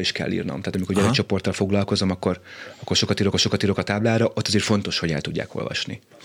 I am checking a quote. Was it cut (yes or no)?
yes